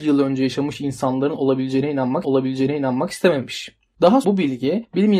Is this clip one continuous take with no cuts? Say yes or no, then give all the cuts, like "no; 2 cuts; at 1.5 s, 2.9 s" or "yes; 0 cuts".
no; 2 cuts; at 2.2 s, 4.2 s